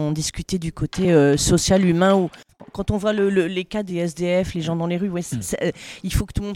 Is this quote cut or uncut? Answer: uncut